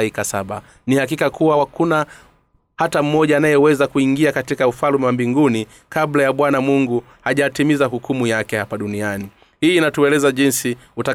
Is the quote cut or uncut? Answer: uncut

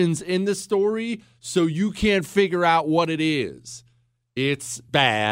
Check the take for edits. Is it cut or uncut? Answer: uncut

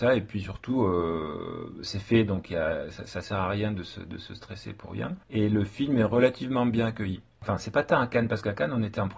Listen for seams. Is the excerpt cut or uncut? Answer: cut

